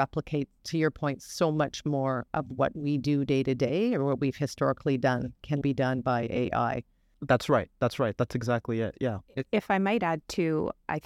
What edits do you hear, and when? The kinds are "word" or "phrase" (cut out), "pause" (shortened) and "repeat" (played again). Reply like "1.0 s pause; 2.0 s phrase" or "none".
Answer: 5.6 s word